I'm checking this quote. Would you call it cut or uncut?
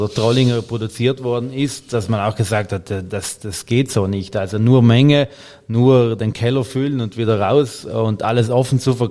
uncut